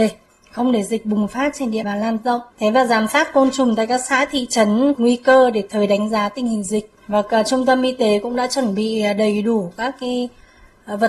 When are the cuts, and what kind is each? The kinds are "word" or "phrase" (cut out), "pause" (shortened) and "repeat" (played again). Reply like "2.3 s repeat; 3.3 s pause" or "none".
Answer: 1.8 s word; 2.5 s pause; 5.0 s phrase; 5.7 s word; 7.0 s pause

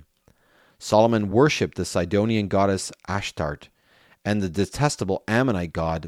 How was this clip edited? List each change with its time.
none

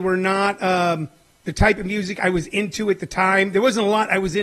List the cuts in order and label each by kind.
none

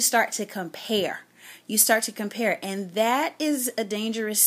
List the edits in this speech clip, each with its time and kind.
none

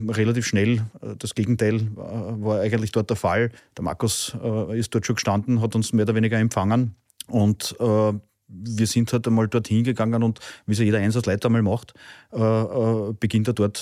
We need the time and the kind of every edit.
3.6 s pause; 7.1 s pause

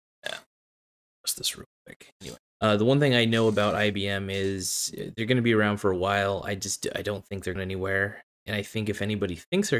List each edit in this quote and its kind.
2.5 s pause; 7.6 s word

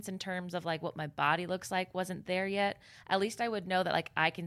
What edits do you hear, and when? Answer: none

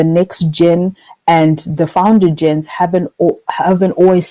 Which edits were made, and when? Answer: none

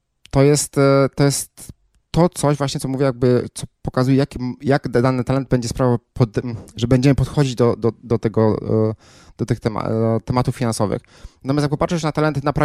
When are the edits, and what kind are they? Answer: none

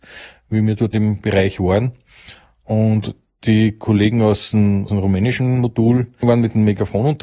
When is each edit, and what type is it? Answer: 0.9 s word; 4.9 s word

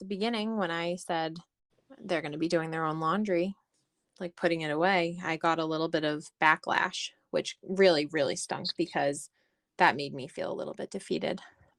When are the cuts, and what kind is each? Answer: none

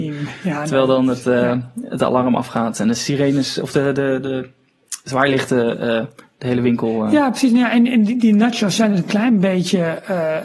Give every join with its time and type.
none

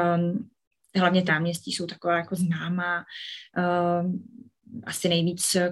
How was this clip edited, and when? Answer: 1.3 s word

